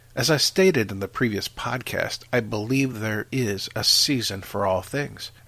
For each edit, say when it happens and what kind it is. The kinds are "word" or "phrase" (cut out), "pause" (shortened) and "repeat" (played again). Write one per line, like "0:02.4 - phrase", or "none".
none

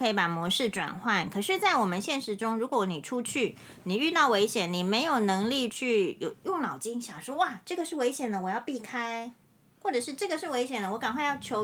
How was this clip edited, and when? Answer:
none

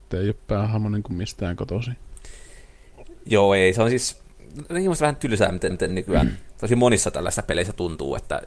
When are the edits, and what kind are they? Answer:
0:05.7 - repeat

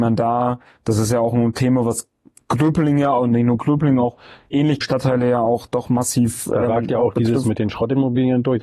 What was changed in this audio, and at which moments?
0:04.8 - word

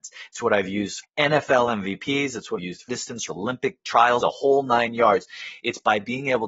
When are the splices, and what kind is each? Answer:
0:01.0 - word
0:02.6 - word
0:02.9 - word
0:03.3 - word
0:04.2 - word

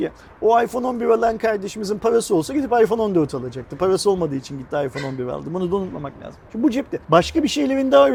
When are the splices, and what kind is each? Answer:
0:06.5 - pause
0:07.0 - pause

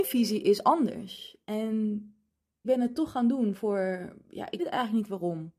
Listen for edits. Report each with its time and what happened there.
0:02.6 - word
0:03.5 - word
0:04.6 - word

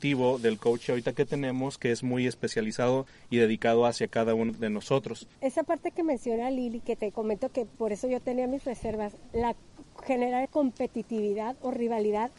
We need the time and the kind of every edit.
0:04.5 - word
0:05.3 - pause
0:10.4 - word

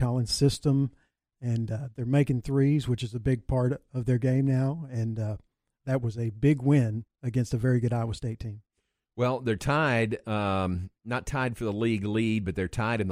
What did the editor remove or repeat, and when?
none

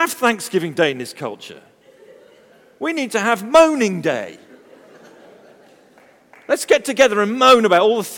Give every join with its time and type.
none

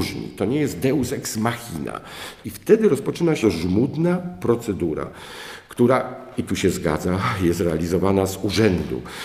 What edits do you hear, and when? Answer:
0:03.4 - word

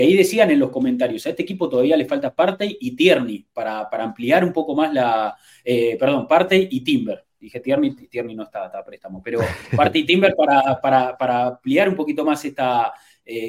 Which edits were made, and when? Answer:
none

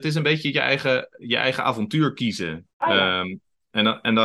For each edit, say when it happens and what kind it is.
0:02.7 - pause

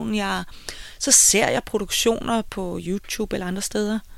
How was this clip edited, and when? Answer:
none

